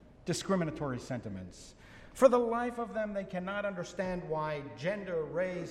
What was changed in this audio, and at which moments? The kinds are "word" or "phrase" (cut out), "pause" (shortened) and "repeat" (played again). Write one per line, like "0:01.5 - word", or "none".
none